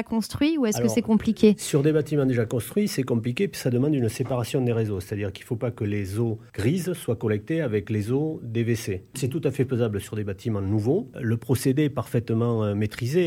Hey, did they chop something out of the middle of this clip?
no; 0 cuts

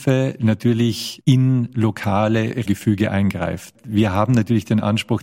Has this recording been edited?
yes; 2 cuts; at 1.2 s, 2.7 s

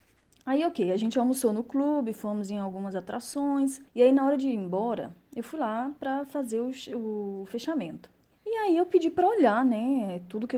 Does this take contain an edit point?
yes; 2 cuts; at 3.9 s, 8.3 s

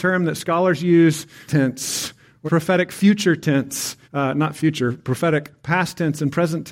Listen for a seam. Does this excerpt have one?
yes; 3 cuts; at 1.5 s, 2.5 s, 4.0 s

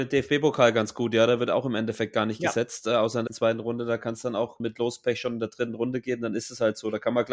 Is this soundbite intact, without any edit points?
no; 2 cuts; at 3.3 s, 4.6 s

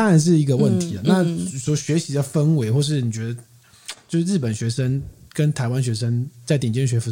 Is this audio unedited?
yes; 0 cuts

